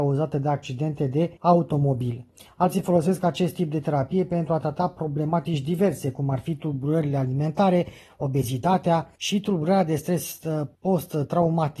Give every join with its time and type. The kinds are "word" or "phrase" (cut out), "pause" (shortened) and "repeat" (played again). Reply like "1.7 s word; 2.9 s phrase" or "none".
1.4 s pause; 9.2 s pause; 10.7 s pause